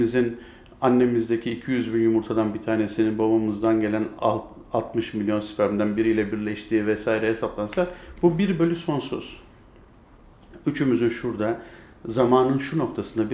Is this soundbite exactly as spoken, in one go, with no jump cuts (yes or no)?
no